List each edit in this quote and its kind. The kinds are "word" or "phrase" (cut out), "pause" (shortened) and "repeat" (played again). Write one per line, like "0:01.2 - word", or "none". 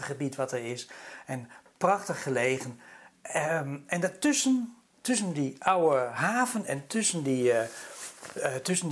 none